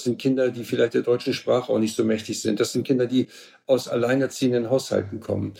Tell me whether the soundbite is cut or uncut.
uncut